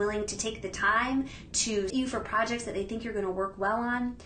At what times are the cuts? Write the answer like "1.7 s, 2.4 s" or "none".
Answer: 1.9 s